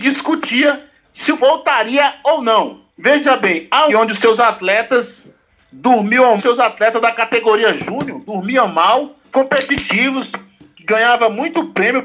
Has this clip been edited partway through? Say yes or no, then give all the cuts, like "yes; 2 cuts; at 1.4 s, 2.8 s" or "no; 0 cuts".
yes; 5 cuts; at 1.4 s, 2.9 s, 3.9 s, 6.4 s, 9.2 s